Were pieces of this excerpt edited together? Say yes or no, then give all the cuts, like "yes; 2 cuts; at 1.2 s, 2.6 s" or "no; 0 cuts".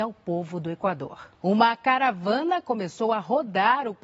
yes; 1 cut; at 1.3 s